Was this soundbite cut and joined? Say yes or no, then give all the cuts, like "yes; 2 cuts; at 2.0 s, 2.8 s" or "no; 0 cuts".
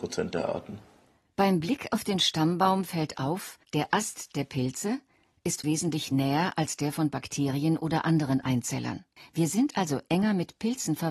yes; 3 cuts; at 3.6 s, 5.6 s, 9.2 s